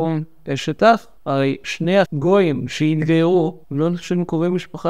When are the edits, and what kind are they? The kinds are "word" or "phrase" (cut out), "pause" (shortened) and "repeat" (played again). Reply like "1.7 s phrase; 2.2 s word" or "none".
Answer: 1.2 s pause; 2.0 s word; 3.6 s pause